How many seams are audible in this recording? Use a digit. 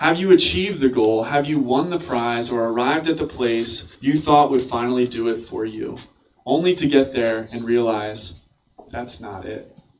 1